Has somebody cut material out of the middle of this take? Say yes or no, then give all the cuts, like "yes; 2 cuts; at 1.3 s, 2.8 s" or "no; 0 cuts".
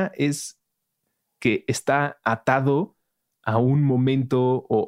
no; 0 cuts